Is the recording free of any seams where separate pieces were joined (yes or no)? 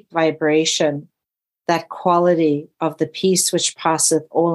no